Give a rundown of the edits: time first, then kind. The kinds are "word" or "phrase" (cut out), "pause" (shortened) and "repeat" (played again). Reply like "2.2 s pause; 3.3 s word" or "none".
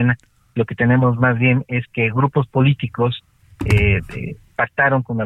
none